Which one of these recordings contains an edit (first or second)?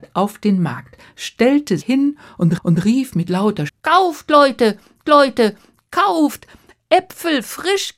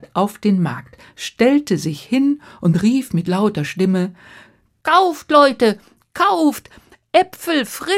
first